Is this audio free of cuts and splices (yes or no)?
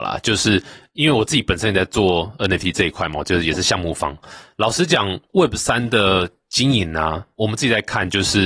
yes